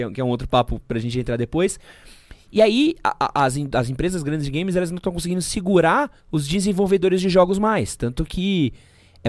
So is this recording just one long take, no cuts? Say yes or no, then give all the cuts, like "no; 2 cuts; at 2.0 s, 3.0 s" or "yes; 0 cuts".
no; 1 cut; at 6.2 s